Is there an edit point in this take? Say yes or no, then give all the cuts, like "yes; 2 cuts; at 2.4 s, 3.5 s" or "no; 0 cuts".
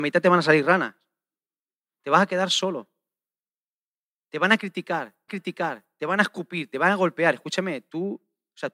yes; 1 cut; at 5.3 s